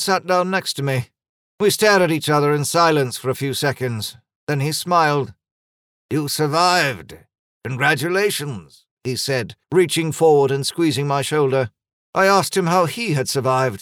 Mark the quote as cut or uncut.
cut